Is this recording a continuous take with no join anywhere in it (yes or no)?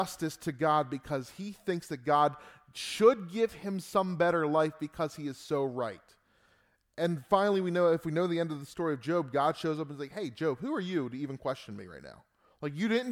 yes